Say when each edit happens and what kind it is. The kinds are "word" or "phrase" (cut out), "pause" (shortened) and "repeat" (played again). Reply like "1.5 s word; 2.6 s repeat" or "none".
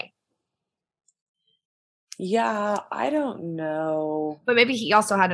none